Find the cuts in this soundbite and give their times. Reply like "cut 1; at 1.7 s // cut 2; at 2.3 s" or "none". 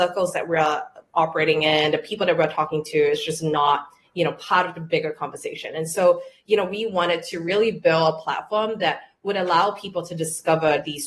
none

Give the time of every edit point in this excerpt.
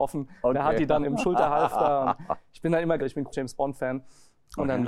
cut 1; at 1.0 s // cut 2; at 3.0 s // cut 3; at 3.3 s

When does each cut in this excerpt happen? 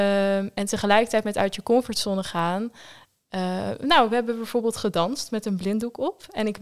none

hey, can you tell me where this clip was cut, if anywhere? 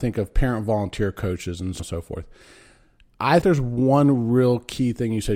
cut 1; at 1.8 s // cut 2; at 3.4 s

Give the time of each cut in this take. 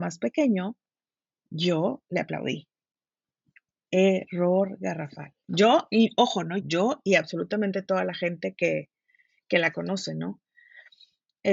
cut 1; at 6.6 s

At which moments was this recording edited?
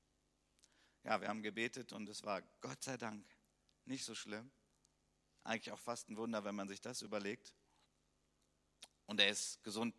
none

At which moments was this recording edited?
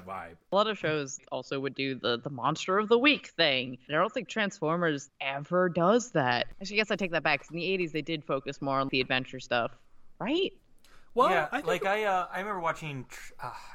none

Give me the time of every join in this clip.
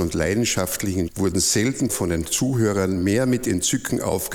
cut 1; at 1.1 s // cut 2; at 1.9 s

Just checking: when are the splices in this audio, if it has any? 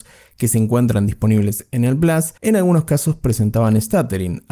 cut 1; at 2.4 s

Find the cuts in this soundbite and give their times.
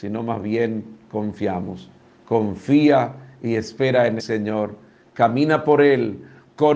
cut 1; at 4.2 s

